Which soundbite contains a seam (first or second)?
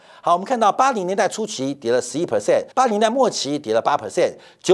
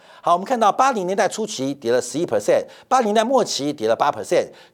first